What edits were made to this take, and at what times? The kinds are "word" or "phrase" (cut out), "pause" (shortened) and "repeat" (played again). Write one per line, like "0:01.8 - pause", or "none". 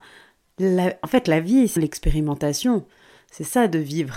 0:01.8 - word